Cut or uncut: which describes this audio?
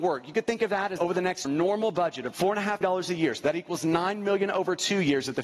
cut